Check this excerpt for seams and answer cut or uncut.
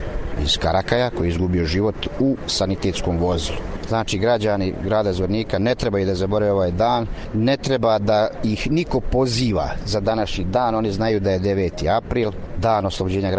uncut